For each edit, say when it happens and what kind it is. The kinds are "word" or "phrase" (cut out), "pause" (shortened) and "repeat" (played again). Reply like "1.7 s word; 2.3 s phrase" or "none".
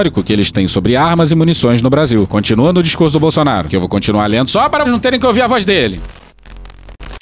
4.8 s word